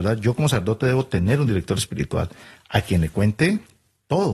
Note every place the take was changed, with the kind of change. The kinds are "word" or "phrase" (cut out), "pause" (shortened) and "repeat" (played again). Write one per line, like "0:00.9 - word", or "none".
none